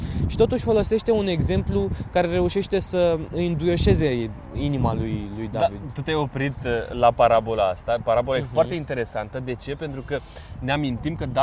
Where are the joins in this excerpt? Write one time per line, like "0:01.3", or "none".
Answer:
none